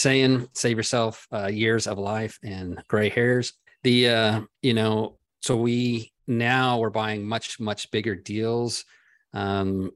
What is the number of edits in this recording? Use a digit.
3